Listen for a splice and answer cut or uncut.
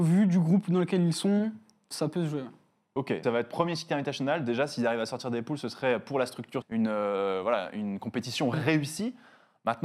cut